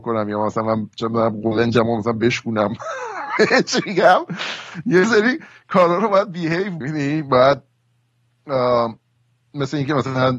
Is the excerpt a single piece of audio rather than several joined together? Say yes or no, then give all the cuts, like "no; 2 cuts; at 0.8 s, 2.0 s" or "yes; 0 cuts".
no; 1 cut; at 6.8 s